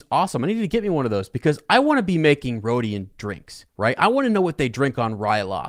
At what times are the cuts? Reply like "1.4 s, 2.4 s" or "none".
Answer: 3.7 s